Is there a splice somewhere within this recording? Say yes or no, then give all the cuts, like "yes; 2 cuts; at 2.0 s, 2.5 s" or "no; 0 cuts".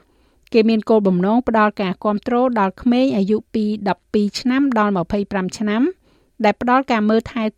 no; 0 cuts